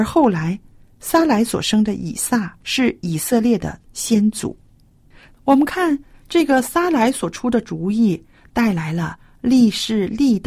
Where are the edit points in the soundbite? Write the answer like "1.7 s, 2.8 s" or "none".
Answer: 2.6 s